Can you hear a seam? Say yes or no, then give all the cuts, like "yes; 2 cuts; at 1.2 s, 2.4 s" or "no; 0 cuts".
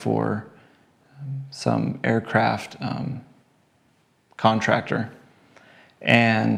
no; 0 cuts